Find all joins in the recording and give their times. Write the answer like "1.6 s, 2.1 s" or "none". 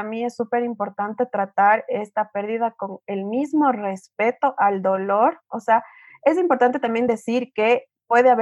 none